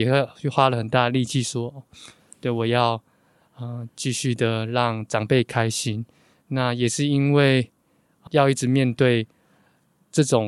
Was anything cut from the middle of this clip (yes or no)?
yes